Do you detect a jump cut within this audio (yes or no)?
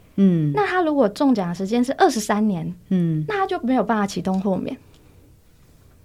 no